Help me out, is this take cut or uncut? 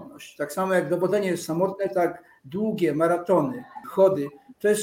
cut